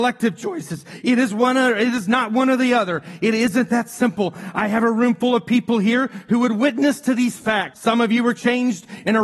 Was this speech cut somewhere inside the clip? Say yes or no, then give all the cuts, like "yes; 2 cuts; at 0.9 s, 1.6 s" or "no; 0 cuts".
yes; 1 cut; at 7.7 s